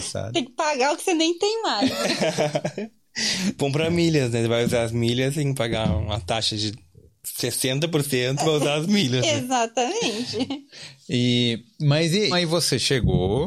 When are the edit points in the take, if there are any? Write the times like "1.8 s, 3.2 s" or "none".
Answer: 12.3 s